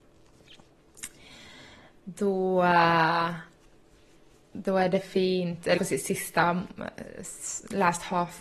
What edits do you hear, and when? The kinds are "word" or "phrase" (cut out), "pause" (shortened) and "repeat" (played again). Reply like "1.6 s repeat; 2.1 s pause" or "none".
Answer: 5.8 s word